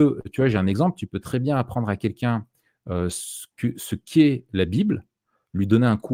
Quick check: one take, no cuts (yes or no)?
yes